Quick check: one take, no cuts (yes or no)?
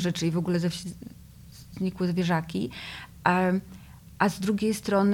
yes